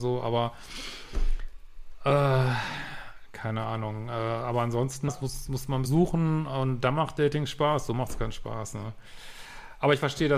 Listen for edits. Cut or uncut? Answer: cut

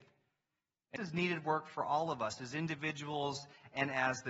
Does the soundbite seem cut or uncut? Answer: cut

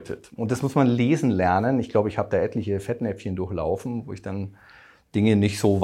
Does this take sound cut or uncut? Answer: uncut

